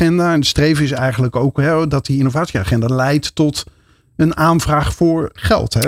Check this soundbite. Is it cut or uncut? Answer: uncut